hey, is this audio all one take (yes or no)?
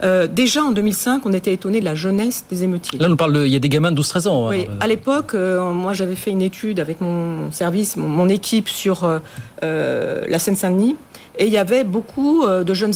yes